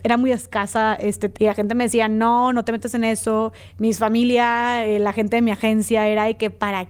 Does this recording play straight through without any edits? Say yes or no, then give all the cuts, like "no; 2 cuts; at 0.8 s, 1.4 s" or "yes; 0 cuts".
no; 1 cut; at 1.4 s